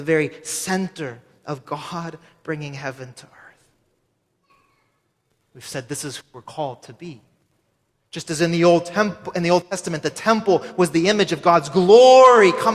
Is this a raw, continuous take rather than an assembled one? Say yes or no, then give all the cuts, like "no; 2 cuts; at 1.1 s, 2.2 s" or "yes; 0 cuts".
yes; 0 cuts